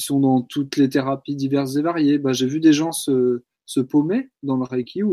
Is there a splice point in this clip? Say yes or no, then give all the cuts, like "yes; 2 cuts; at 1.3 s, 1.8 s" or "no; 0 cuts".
no; 0 cuts